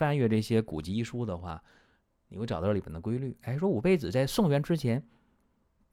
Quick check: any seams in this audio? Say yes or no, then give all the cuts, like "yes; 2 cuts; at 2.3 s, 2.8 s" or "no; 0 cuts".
no; 0 cuts